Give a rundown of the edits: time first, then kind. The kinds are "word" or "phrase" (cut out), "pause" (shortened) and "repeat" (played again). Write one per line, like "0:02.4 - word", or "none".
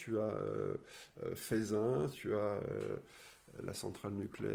0:02.1 - word